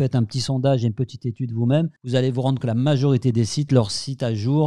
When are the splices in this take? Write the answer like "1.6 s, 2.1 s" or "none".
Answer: 2.0 s, 2.6 s, 3.7 s